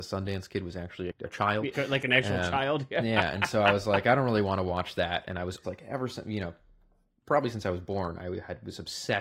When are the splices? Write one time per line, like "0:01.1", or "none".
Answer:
0:01.1
0:01.7
0:05.6